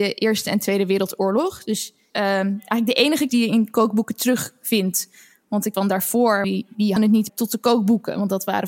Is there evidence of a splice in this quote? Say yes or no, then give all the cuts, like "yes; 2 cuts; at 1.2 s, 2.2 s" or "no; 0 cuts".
yes; 6 cuts; at 2.1 s, 3.3 s, 5.7 s, 6.4 s, 7.0 s, 7.3 s